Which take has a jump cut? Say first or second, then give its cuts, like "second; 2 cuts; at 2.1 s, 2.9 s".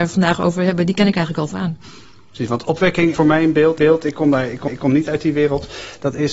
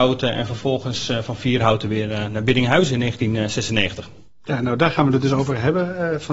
first; 4 cuts; at 1.5 s, 3.1 s, 3.8 s, 4.7 s